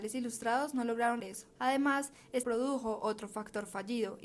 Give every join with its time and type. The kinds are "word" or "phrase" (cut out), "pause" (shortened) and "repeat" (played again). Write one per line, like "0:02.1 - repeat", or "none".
0:01.2 - word
0:01.5 - pause
0:02.4 - word